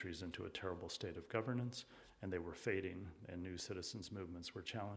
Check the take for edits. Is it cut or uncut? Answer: uncut